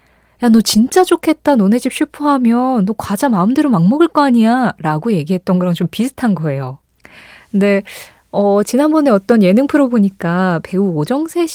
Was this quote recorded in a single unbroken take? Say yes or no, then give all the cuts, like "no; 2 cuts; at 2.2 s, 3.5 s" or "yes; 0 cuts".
yes; 0 cuts